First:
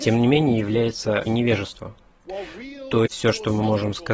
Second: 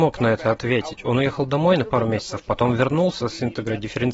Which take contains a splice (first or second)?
first